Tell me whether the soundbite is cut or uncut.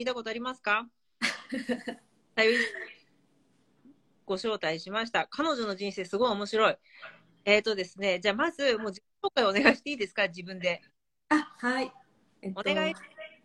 uncut